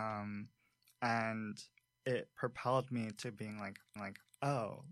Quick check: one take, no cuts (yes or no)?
no